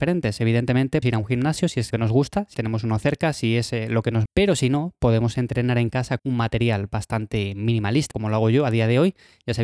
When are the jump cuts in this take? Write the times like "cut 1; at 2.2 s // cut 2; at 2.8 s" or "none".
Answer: cut 1; at 1.0 s // cut 2; at 1.9 s // cut 3; at 2.5 s // cut 4; at 4.3 s // cut 5; at 6.2 s // cut 6; at 8.1 s